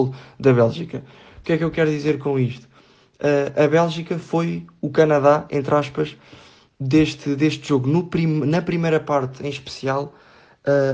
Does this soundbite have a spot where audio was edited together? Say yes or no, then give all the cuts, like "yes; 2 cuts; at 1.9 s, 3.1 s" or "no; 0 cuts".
no; 0 cuts